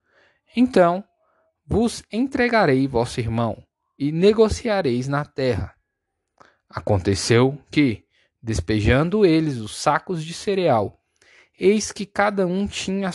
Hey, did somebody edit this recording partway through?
no; 0 cuts

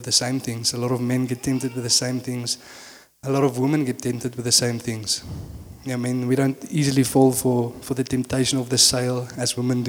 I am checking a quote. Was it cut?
no; 0 cuts

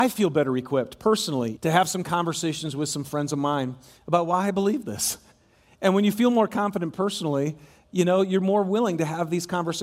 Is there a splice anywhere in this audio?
yes; 1 cut; at 1.6 s

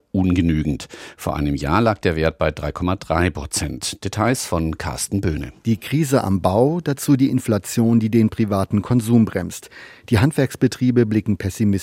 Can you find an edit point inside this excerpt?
yes; 1 cut; at 5.6 s

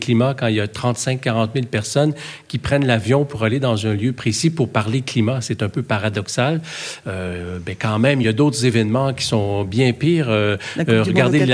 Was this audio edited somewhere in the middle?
no; 0 cuts

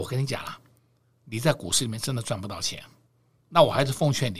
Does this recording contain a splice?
no; 0 cuts

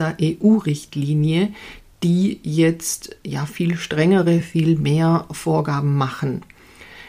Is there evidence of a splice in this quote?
no; 0 cuts

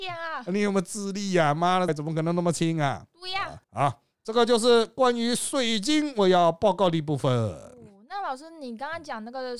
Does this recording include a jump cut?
yes; 2 cuts; at 1.9 s, 3.6 s

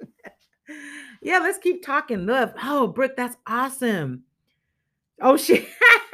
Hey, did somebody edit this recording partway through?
no; 0 cuts

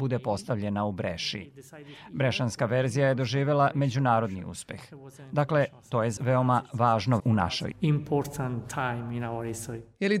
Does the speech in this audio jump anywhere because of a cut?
yes; 3 cuts; at 6.2 s, 7.2 s, 7.7 s

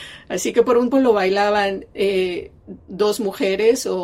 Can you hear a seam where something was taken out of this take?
yes; 1 cut; at 0.9 s

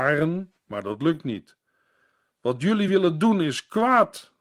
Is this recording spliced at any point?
no; 0 cuts

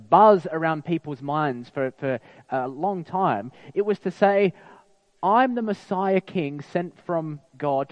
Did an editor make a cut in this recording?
no; 0 cuts

